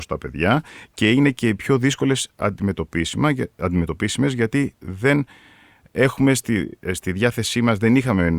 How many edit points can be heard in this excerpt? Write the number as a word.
zero